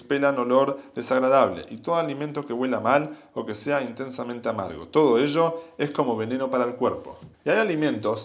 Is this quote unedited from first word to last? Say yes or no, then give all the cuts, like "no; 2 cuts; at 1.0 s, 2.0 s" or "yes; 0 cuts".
no; 1 cut; at 7.3 s